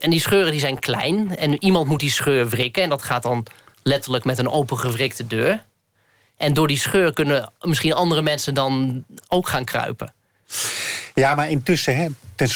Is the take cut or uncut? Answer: uncut